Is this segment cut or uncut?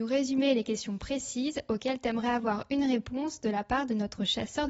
uncut